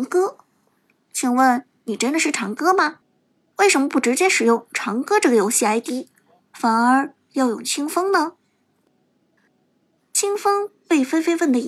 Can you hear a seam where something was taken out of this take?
no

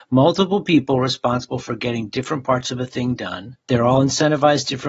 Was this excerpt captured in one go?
no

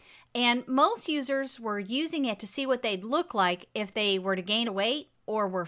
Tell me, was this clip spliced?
yes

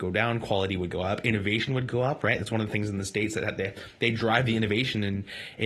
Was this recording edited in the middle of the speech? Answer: no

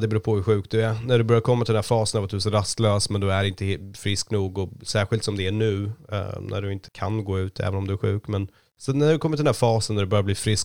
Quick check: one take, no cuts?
no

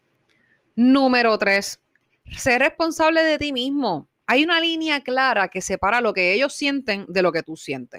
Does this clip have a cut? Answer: no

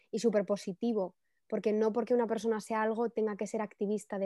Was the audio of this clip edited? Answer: no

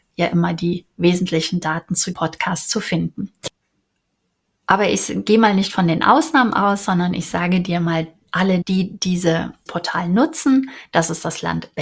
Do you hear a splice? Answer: yes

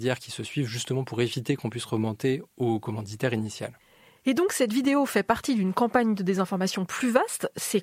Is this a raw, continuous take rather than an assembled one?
yes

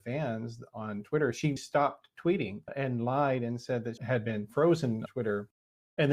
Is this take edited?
yes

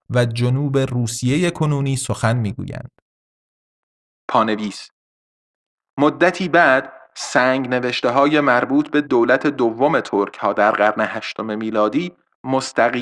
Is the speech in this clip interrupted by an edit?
no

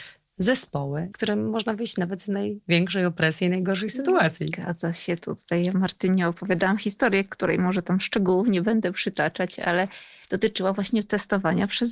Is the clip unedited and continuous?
no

